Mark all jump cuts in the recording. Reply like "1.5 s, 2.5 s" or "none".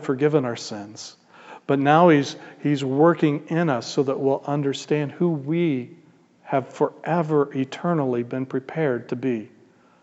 none